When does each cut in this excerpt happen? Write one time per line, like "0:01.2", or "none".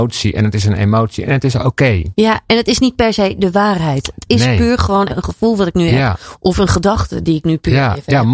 0:05.1